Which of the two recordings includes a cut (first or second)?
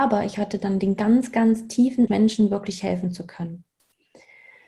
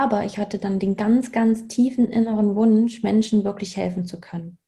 first